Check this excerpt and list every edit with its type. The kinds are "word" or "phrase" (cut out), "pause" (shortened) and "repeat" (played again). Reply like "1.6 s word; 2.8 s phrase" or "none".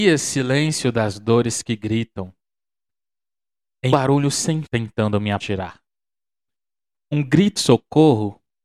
3.9 s word; 4.6 s word; 5.4 s word; 7.6 s word